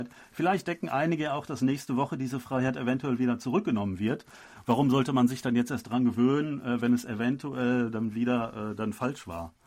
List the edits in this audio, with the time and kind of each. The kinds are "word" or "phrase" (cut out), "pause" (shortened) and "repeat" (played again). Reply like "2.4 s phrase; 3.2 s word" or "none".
none